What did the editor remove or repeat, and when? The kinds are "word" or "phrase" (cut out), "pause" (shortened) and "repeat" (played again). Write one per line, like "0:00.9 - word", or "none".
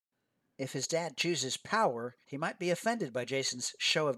0:02.2 - pause